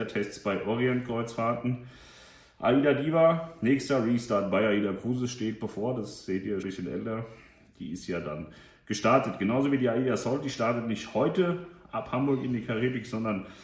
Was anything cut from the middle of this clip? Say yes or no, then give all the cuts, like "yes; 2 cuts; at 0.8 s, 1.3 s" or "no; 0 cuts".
yes; 1 cut; at 6.6 s